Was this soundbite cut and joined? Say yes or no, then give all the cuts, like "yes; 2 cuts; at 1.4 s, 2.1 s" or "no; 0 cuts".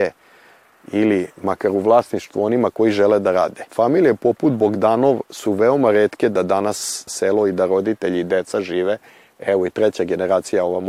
yes; 2 cuts; at 3.7 s, 7.1 s